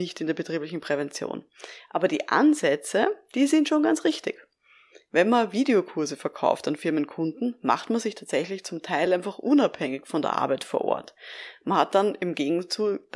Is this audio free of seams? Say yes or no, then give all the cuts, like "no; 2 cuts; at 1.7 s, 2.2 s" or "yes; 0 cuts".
yes; 0 cuts